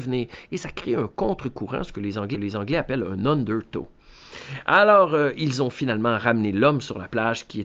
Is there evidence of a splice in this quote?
yes; 1 cut; at 2.3 s

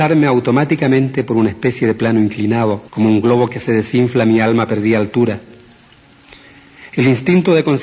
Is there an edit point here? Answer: yes; 1 cut; at 2.9 s

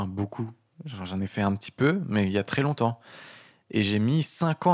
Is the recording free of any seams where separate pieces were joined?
yes; 0 cuts

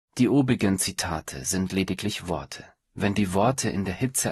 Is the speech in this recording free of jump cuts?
yes; 0 cuts

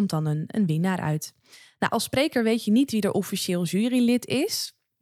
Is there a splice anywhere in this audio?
no; 0 cuts

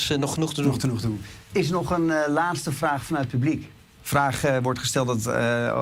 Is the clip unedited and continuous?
yes; 0 cuts

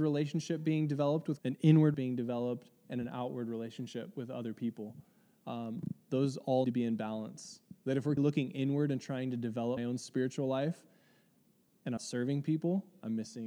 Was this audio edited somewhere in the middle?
yes; 6 cuts; at 1.4 s, 1.9 s, 6.6 s, 8.2 s, 9.8 s, 12.0 s

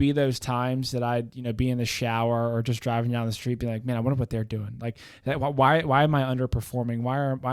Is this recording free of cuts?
yes; 0 cuts

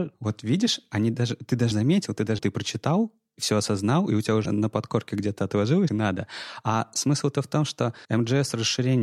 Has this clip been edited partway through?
yes; 5 cuts; at 1.7 s, 2.4 s, 4.5 s, 5.9 s, 8.0 s

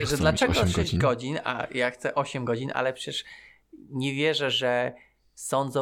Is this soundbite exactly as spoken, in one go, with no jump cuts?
yes; 0 cuts

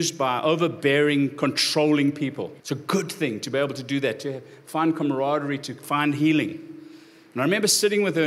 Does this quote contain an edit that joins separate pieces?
yes; 1 cut; at 2.6 s

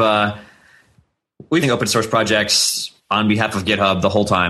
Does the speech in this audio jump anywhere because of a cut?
yes; 2 cuts; at 1.6 s, 3.0 s

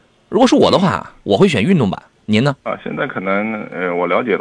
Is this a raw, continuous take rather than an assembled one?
no; 3 cuts; at 1.2 s, 2.1 s, 2.6 s

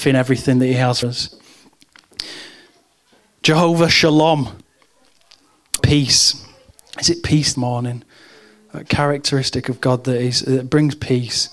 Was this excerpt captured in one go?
no; 4 cuts; at 1.0 s, 5.8 s, 6.7 s, 7.5 s

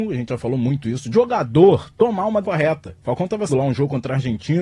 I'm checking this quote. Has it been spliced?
yes; 4 cuts; at 1.1 s, 2.4 s, 3.0 s, 3.5 s

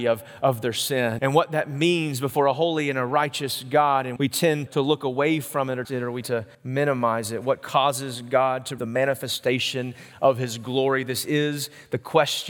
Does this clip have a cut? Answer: yes; 7 cuts; at 1.2 s, 4.2 s, 4.7 s, 5.8 s, 6.2 s, 6.5 s, 8.8 s

